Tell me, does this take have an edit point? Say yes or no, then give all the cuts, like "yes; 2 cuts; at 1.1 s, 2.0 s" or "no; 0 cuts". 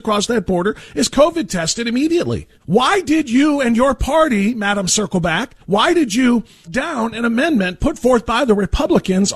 yes; 3 cuts; at 2.5 s, 5.6 s, 6.6 s